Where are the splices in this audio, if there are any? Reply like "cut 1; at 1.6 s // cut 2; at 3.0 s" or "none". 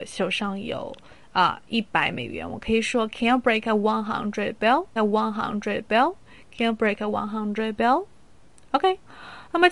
cut 1; at 5.0 s